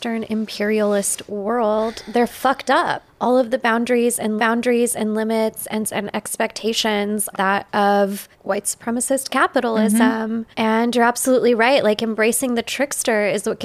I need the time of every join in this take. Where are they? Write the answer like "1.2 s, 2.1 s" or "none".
3.1 s, 4.4 s, 5.8 s, 7.3 s, 8.3 s, 10.5 s